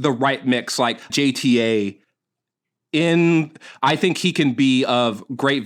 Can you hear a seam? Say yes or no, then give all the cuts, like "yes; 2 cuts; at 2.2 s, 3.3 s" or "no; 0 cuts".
yes; 1 cut; at 1.1 s